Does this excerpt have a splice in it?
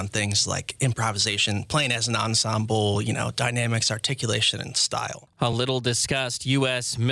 no; 0 cuts

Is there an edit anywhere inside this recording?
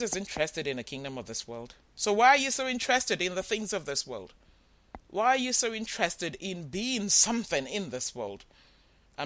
yes; 1 cut; at 1.8 s

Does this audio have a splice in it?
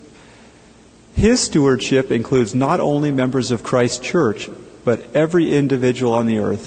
no; 0 cuts

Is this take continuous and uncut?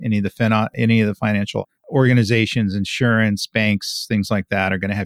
no; 1 cut; at 1.8 s

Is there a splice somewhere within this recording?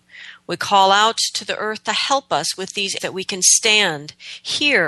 yes; 1 cut; at 3.0 s

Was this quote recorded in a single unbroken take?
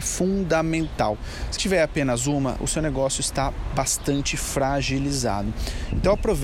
no; 1 cut; at 1.6 s

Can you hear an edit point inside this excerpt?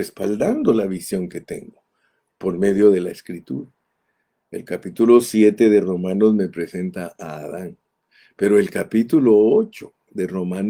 no; 0 cuts

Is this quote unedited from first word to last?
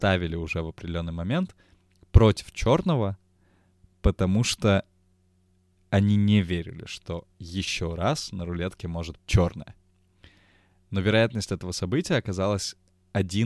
no; 1 cut; at 9.2 s

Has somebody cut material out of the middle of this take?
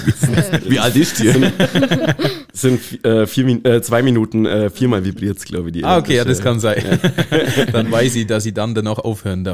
no; 0 cuts

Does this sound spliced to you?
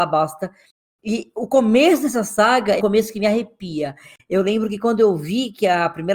yes; 1 cut; at 2.8 s

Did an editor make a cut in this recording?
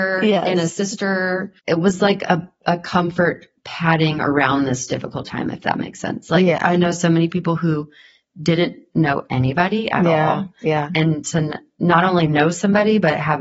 yes; 2 cuts; at 1.6 s, 3.6 s

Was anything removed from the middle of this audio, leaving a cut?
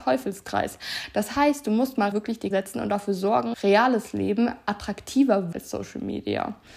yes; 4 cuts; at 2.1 s, 2.5 s, 3.5 s, 5.5 s

